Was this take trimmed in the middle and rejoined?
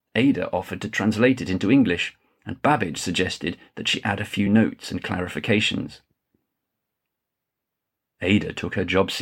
no; 0 cuts

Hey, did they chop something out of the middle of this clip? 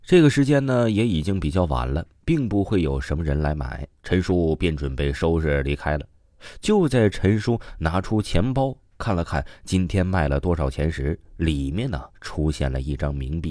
yes; 2 cuts; at 3.9 s, 12.1 s

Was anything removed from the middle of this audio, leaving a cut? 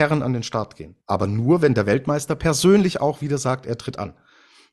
yes; 1 cut; at 1.0 s

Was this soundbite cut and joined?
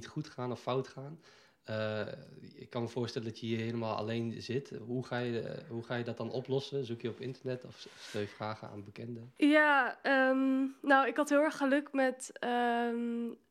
no; 0 cuts

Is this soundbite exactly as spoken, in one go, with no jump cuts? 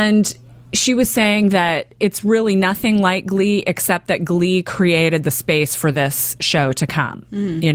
yes; 0 cuts

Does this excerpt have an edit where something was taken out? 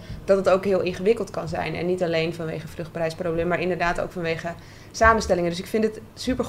no; 0 cuts

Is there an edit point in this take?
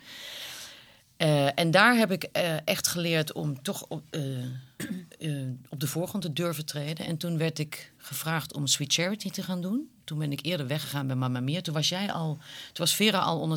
no; 0 cuts

